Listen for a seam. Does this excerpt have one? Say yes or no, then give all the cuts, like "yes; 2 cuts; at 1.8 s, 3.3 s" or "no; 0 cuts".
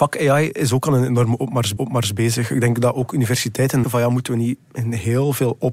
yes; 3 cuts; at 1.8 s, 3.8 s, 4.6 s